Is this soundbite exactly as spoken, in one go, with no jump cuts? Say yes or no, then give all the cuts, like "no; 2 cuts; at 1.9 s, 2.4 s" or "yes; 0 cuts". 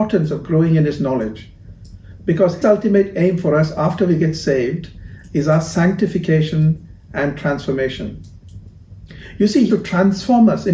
no; 2 cuts; at 2.6 s, 9.7 s